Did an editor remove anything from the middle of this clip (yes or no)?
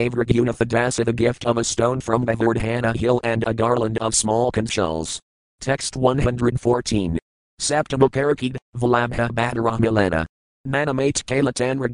no